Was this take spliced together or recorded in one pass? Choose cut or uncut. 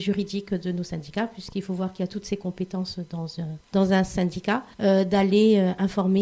cut